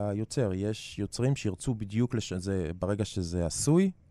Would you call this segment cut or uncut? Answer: uncut